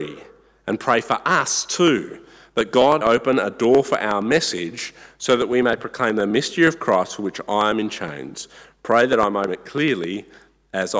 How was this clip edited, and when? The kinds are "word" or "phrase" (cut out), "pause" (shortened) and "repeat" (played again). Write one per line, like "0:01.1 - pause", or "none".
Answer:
0:03.0 - word
0:09.5 - word